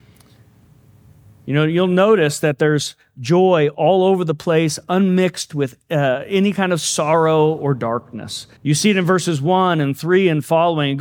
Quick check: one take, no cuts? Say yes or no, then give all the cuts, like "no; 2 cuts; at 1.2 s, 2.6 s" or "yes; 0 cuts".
no; 1 cut; at 8.6 s